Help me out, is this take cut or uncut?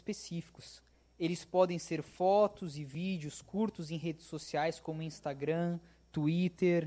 uncut